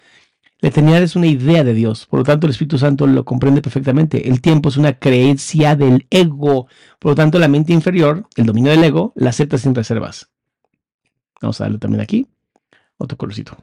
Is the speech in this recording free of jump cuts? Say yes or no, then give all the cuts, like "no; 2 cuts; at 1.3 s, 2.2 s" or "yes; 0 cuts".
yes; 0 cuts